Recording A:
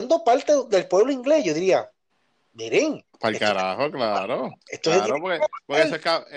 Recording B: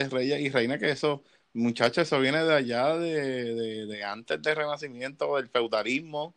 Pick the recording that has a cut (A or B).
A